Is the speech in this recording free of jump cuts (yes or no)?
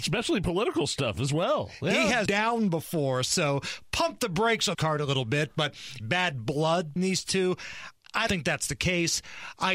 no